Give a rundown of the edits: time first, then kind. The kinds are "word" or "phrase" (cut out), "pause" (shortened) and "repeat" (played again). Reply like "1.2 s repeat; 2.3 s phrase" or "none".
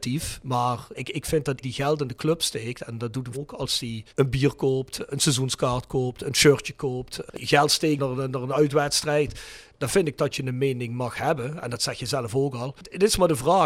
0.9 s word; 1.6 s word; 3.3 s word; 4.1 s pause